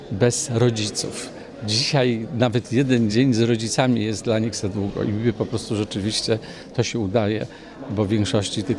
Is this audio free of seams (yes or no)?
yes